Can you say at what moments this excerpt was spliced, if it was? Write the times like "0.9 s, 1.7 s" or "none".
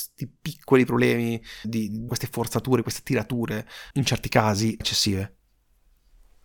1.6 s, 2.1 s, 3.9 s, 4.8 s